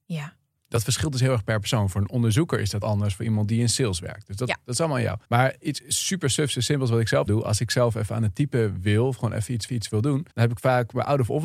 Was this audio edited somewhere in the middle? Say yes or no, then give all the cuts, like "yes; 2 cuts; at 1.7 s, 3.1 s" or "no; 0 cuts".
yes; 5 cuts; at 2.8 s, 5.2 s, 7.3 s, 9.7 s, 10.3 s